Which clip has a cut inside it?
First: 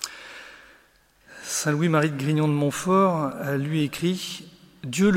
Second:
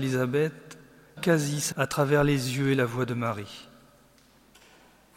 second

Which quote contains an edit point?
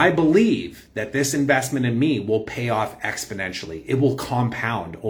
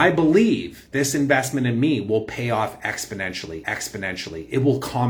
second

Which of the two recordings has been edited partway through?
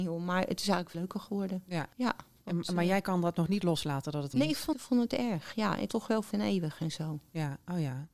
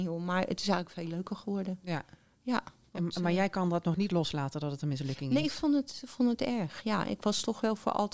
first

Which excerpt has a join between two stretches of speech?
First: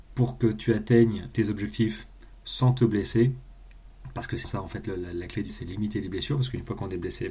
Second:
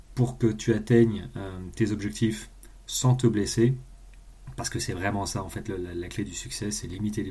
first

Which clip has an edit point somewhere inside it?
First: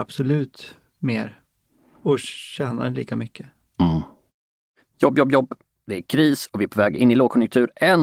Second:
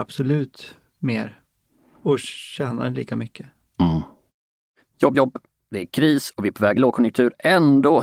second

